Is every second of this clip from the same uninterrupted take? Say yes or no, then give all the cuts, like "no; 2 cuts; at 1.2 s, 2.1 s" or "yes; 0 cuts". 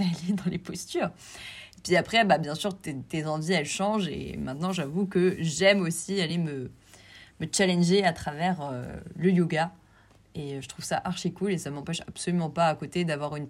yes; 0 cuts